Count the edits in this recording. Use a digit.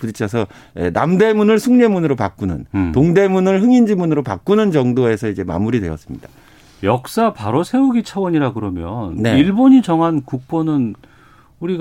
0